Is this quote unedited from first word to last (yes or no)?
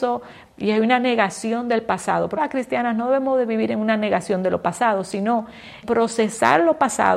no